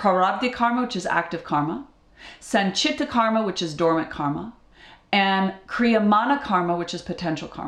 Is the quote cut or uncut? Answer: uncut